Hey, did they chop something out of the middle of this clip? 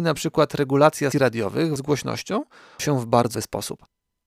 yes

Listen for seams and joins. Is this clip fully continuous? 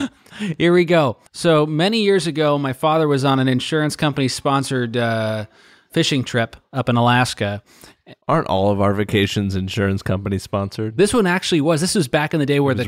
no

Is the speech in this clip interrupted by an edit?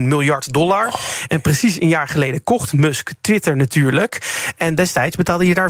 no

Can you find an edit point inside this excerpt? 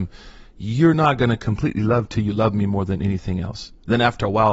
no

